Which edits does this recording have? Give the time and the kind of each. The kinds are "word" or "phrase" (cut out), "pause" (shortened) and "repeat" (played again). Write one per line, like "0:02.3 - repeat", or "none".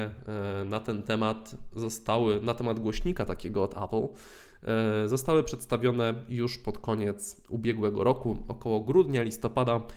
none